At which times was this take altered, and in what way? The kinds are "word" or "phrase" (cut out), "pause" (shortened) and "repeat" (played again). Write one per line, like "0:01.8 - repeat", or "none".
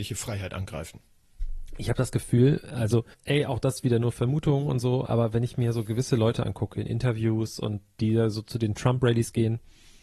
0:03.1 - pause